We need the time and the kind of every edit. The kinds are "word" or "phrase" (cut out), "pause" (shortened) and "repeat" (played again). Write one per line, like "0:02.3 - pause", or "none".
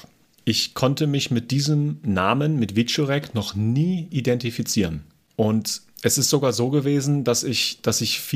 none